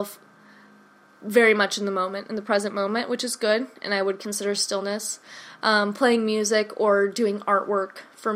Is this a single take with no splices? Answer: yes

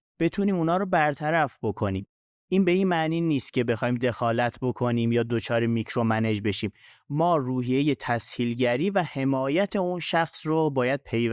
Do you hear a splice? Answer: no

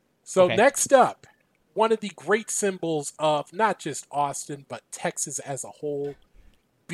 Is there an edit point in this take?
yes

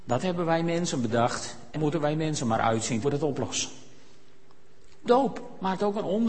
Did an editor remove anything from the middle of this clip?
yes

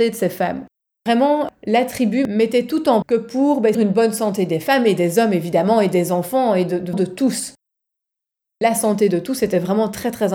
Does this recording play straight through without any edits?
no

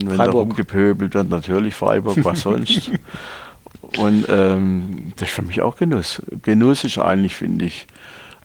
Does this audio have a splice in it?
no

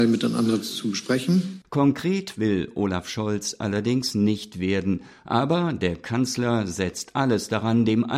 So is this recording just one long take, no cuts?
yes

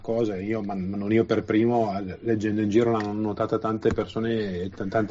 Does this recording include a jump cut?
no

